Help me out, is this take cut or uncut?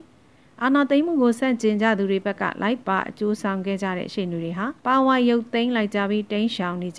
cut